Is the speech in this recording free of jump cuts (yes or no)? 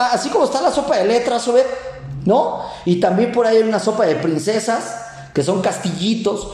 yes